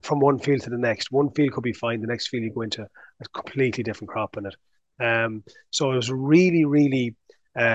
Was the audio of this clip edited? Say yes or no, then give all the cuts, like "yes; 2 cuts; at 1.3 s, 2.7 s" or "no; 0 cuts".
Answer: no; 0 cuts